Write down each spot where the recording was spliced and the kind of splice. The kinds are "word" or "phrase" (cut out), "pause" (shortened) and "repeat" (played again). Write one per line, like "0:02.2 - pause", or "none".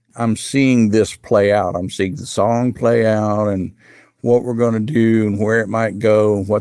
none

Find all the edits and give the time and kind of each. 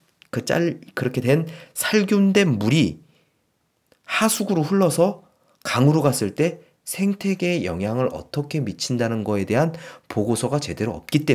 none

